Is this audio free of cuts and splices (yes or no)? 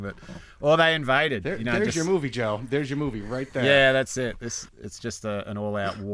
no